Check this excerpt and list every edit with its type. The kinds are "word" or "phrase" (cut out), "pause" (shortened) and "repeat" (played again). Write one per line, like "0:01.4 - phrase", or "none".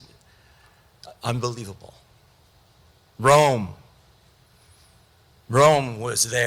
none